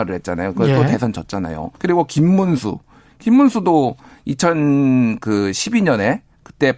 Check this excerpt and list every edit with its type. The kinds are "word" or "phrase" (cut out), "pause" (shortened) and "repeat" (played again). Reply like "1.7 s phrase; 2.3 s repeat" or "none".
1.8 s pause